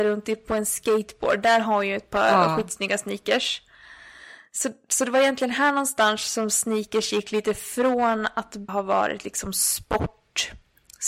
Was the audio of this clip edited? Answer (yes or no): yes